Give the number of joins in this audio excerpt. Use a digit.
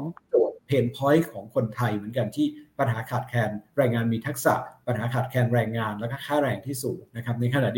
0